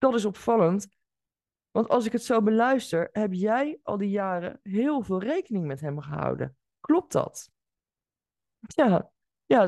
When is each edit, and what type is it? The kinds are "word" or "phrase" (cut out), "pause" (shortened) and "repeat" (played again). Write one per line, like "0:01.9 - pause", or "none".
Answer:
none